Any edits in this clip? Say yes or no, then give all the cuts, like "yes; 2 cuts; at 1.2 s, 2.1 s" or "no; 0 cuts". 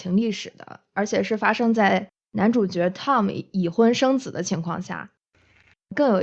no; 0 cuts